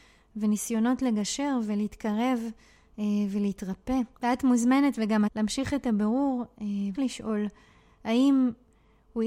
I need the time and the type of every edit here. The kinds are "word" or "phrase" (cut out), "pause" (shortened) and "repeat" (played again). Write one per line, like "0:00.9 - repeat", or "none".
0:04.1 - pause
0:05.3 - phrase
0:06.9 - word